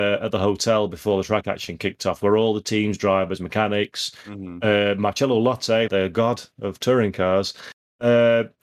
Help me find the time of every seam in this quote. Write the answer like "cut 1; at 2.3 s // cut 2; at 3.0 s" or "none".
cut 1; at 5.9 s